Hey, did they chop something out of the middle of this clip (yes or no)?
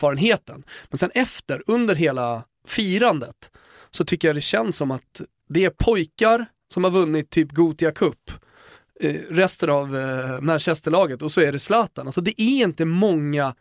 no